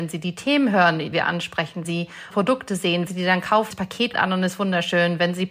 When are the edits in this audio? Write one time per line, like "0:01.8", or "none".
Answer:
0:01.1
0:01.8
0:02.3
0:03.1
0:03.7
0:04.1